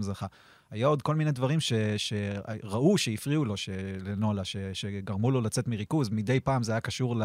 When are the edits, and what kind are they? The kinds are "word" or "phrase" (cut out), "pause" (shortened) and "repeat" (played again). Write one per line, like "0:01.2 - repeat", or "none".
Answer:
none